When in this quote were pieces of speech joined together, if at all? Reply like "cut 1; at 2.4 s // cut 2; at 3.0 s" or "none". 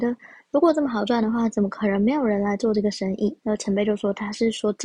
cut 1; at 3.4 s